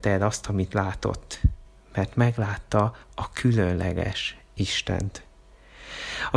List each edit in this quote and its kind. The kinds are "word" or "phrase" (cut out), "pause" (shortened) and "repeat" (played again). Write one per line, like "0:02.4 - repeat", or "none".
0:01.7 - pause
0:03.0 - pause